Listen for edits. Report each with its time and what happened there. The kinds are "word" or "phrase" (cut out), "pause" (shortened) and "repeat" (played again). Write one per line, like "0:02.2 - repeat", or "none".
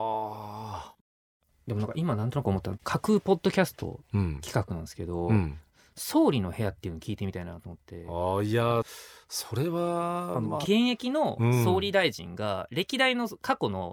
none